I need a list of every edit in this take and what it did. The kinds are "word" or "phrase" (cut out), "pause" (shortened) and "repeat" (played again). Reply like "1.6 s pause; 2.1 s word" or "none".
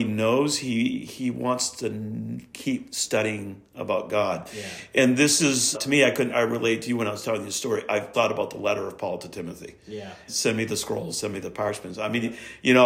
5.7 s word; 6.3 s word; 8.1 s word; 10.3 s word